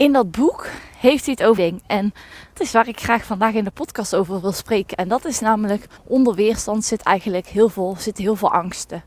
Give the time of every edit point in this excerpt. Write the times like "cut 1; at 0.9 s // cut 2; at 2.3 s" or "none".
cut 1; at 1.6 s // cut 2; at 2.5 s // cut 3; at 6.0 s